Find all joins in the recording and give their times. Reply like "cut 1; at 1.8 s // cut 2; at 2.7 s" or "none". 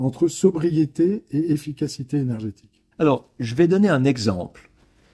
cut 1; at 2.9 s